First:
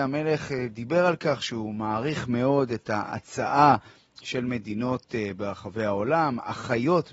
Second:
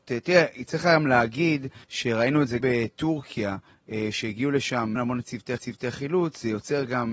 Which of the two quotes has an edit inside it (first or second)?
second